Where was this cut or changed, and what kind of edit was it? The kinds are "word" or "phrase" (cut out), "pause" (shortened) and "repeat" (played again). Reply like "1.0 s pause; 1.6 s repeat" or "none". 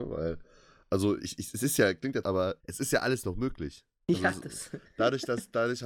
2.2 s phrase; 2.6 s pause